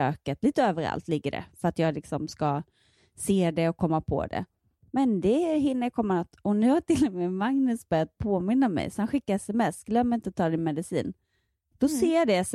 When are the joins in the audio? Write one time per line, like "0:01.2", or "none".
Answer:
none